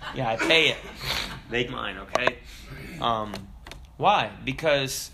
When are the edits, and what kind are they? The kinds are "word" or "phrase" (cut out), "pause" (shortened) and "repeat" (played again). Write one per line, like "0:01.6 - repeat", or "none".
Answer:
0:01.7 - word